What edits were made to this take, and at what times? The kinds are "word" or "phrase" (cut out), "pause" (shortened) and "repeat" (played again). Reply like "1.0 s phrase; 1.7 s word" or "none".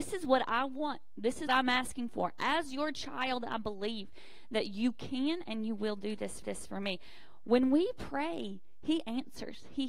1.5 s word; 6.4 s repeat